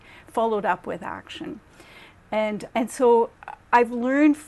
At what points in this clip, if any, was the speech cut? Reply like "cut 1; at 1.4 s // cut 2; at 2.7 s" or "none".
cut 1; at 2.7 s